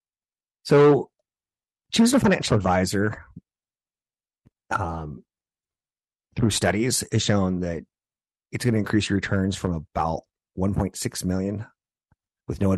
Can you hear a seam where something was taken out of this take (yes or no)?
no